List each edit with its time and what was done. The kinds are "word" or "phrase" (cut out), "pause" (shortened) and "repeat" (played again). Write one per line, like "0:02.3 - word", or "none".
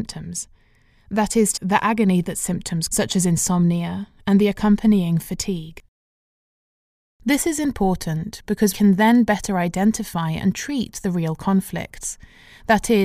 0:01.6 - word
0:02.9 - word
0:08.7 - word